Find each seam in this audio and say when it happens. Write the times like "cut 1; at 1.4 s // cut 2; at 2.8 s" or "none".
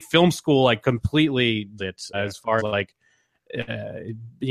cut 1; at 1.8 s // cut 2; at 2.1 s // cut 3; at 2.6 s

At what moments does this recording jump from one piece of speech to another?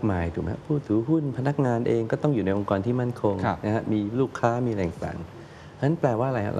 none

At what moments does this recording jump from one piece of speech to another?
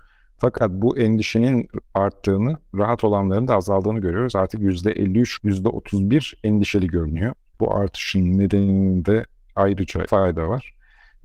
cut 1; at 5.4 s // cut 2; at 7.4 s // cut 3; at 10.1 s

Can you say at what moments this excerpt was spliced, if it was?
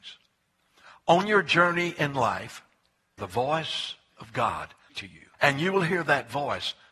cut 1; at 3.2 s // cut 2; at 4.9 s // cut 3; at 5.3 s

